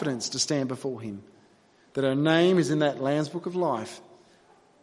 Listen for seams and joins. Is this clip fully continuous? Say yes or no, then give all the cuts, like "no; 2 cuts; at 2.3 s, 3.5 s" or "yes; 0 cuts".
yes; 0 cuts